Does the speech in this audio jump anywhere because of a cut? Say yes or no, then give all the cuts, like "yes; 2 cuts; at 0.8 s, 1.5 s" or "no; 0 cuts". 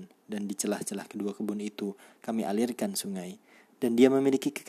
no; 0 cuts